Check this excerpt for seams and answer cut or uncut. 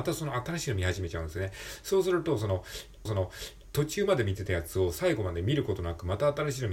cut